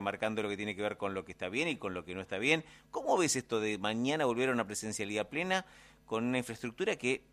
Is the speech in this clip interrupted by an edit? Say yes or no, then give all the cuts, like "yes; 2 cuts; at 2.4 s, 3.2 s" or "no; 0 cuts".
no; 0 cuts